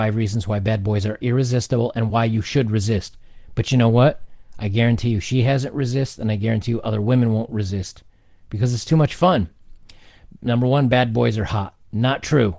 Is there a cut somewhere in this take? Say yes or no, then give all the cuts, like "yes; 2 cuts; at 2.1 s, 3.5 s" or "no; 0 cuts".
no; 0 cuts